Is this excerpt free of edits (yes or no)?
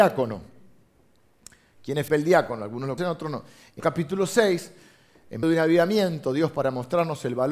no